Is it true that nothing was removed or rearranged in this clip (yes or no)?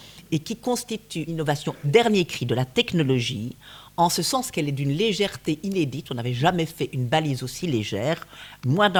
no